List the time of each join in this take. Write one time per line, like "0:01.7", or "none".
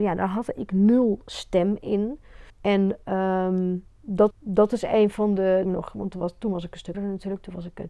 0:02.5
0:04.3
0:05.6
0:06.9